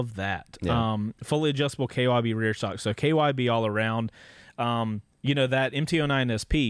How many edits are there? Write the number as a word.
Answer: zero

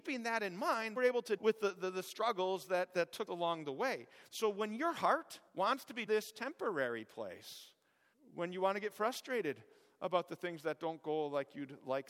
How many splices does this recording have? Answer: seven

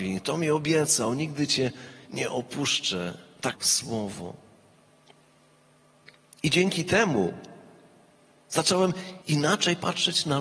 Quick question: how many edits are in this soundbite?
two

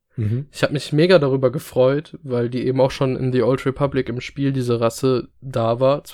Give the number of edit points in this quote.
zero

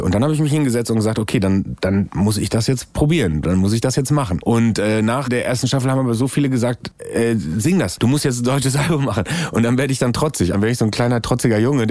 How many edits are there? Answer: two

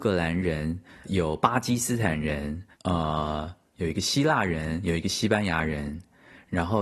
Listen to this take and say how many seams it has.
two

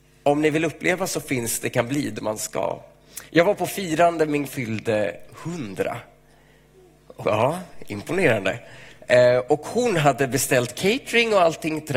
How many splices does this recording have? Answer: four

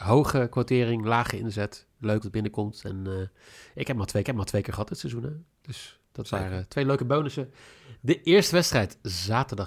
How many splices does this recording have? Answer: three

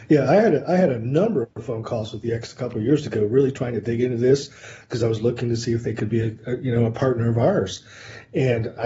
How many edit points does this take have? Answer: zero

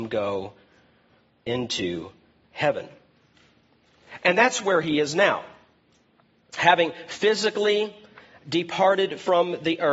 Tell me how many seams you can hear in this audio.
zero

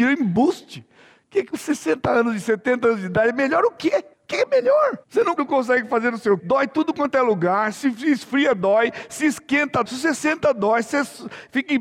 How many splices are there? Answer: six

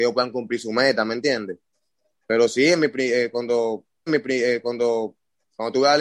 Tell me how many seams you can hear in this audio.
one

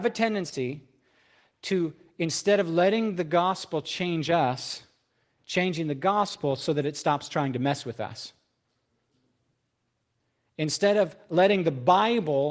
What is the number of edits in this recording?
zero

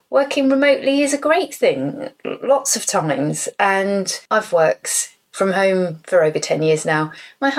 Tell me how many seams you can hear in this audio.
two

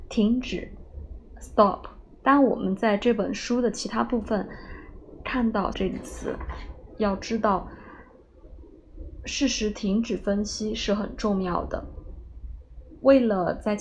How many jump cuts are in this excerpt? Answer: one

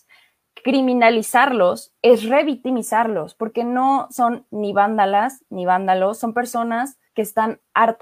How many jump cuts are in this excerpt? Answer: two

